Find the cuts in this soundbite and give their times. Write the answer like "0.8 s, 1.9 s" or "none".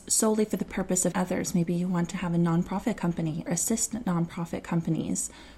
1.1 s, 3.5 s